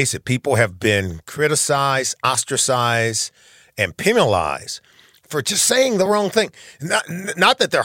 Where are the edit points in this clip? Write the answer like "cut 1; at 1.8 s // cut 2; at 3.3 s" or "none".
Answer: none